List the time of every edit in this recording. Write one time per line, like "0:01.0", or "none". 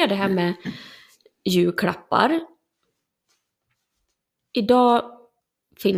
none